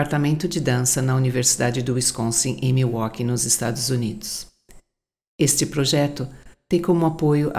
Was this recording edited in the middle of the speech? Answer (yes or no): no